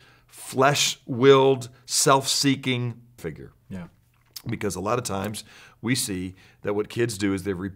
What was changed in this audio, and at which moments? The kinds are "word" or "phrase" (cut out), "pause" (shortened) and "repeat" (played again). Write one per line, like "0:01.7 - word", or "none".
0:03.2 - word